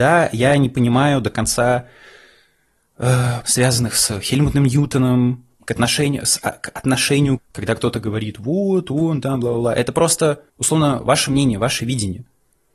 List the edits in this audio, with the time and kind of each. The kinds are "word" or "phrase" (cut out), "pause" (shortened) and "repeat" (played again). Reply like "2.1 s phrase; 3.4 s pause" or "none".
3.4 s word; 7.4 s phrase; 10.5 s pause